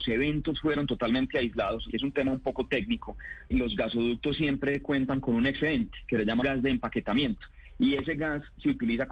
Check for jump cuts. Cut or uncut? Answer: cut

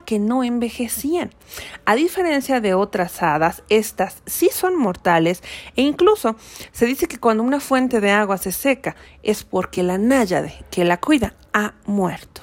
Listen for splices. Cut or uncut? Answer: uncut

